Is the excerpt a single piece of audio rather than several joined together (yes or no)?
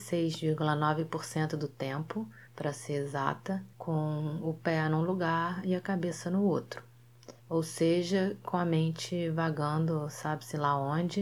no